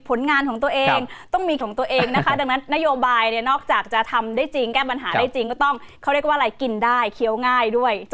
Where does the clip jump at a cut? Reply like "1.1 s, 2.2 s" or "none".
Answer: 1.6 s